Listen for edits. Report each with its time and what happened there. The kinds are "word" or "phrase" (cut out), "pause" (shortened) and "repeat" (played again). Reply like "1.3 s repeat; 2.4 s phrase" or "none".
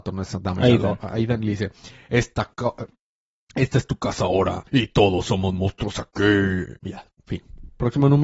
4.7 s pause; 6.8 s pause

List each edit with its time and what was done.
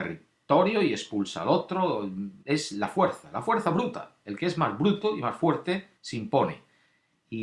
2.4 s pause; 6.0 s pause

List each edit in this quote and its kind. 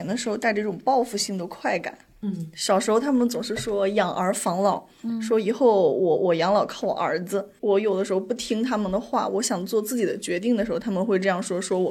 none

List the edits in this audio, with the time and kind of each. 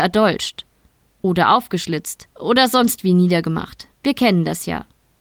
2.3 s pause; 3.9 s pause

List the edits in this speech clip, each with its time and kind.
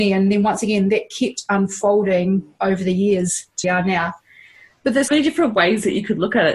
3.6 s phrase; 5.1 s word

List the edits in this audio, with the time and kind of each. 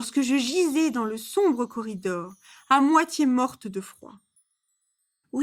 none

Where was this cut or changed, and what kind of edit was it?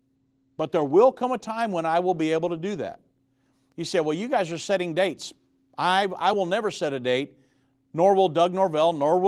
none

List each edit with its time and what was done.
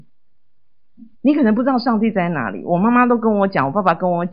1.1 s pause

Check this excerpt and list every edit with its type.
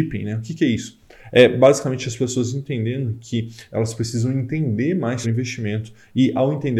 5.2 s word

